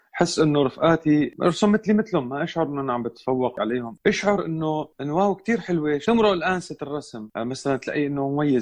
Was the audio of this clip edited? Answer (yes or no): yes